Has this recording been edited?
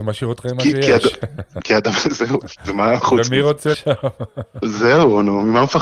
yes; 4 cuts; at 1.6 s, 2.4 s, 3.0 s, 3.7 s

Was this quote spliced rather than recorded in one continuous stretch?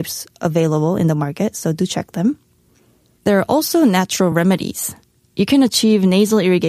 no; 0 cuts

